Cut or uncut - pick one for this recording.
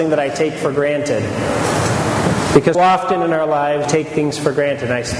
cut